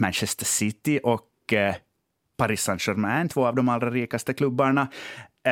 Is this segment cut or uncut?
uncut